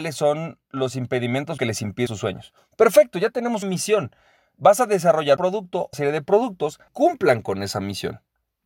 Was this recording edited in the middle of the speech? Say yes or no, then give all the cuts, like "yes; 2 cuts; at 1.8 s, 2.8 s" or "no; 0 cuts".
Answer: yes; 6 cuts; at 1.6 s, 2.1 s, 3.6 s, 5.4 s, 5.9 s, 6.9 s